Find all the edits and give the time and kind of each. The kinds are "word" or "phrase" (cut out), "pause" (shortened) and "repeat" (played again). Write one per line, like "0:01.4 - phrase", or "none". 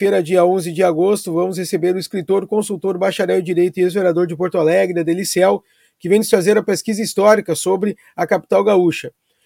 none